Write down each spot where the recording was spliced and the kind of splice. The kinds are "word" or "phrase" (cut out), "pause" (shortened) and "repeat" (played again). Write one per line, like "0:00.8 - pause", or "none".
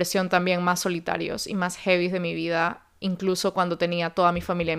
none